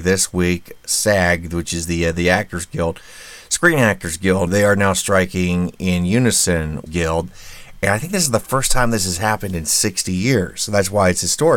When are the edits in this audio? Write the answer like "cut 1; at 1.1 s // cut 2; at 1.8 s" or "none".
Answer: cut 1; at 4.5 s // cut 2; at 6.9 s